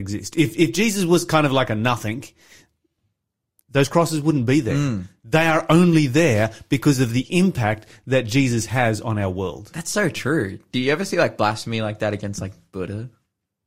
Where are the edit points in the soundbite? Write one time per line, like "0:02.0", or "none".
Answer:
none